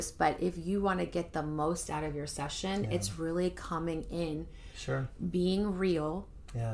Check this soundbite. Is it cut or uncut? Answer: uncut